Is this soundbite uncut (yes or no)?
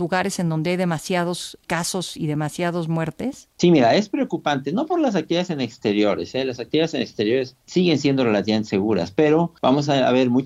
yes